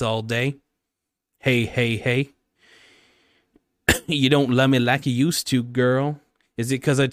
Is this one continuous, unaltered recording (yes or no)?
yes